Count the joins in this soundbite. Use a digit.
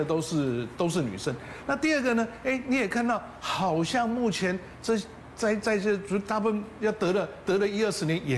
1